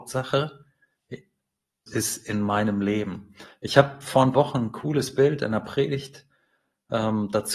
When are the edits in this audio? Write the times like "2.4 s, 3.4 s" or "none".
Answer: 1.9 s, 4.3 s